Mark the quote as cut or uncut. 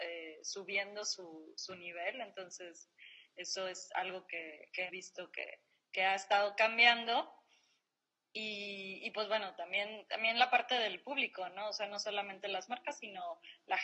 cut